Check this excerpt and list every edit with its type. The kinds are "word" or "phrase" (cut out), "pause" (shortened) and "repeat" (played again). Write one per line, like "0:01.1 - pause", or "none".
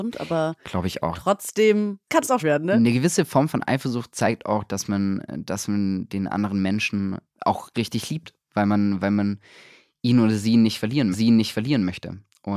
0:02.4 - word
0:06.1 - word
0:11.1 - repeat